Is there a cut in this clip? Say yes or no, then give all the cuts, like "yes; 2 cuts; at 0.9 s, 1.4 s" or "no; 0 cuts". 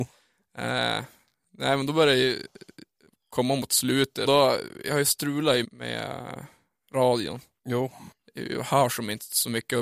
yes; 2 cuts; at 4.2 s, 5.6 s